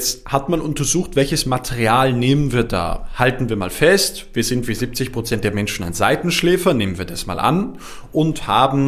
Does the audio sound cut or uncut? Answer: uncut